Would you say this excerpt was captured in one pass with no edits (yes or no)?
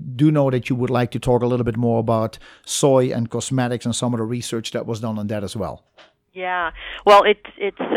yes